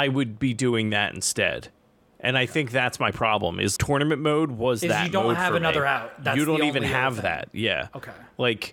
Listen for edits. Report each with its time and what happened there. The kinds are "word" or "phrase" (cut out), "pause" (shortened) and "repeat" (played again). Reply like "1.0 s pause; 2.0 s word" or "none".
3.8 s word